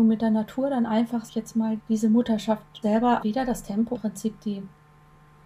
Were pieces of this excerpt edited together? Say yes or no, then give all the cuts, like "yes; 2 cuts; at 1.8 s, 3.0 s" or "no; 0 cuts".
yes; 5 cuts; at 1.3 s, 1.8 s, 2.8 s, 3.2 s, 3.9 s